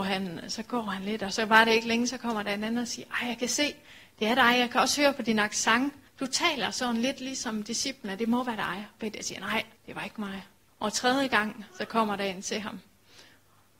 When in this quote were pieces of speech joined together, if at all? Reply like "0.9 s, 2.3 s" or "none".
6.1 s, 9.8 s, 10.7 s